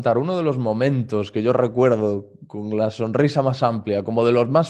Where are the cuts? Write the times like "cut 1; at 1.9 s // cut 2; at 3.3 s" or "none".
none